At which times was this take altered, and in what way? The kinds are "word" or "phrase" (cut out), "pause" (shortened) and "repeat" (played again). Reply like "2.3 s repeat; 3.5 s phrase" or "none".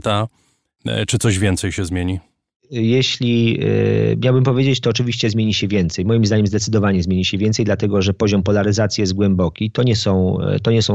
none